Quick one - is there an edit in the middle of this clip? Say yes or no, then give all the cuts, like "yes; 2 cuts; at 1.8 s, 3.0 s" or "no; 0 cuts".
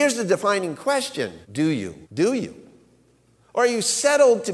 yes; 2 cuts; at 1.4 s, 2.0 s